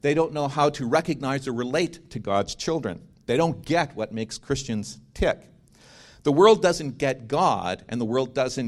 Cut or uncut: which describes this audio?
uncut